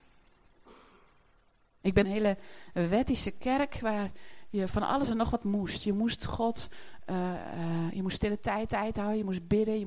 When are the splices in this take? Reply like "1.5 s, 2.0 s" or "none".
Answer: 2.0 s, 8.7 s

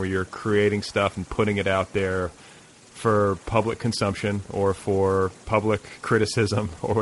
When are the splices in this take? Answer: none

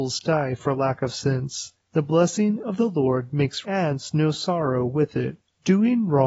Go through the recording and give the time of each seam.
3.6 s

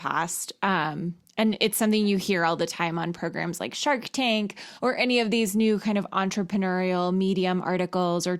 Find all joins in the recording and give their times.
4.8 s

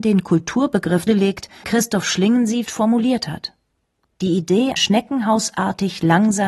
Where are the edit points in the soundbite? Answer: 1.1 s, 1.6 s, 2.6 s, 4.8 s

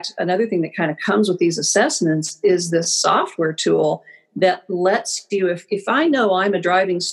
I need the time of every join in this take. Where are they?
none

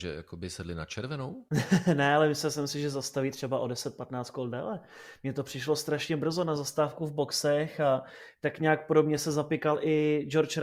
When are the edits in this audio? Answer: 1.5 s

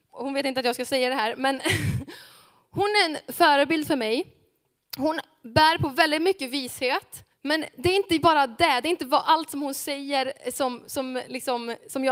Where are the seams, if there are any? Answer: 7.3 s

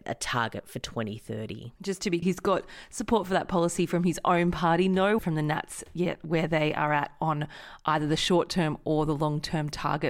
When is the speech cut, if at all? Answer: 1.8 s, 2.2 s, 5.2 s

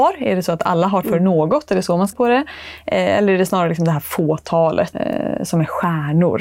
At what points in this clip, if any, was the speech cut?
1.0 s, 2.1 s, 4.9 s

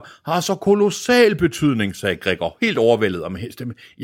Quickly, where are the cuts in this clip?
none

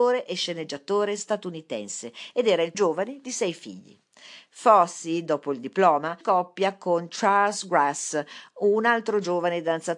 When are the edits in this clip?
2.7 s, 6.2 s

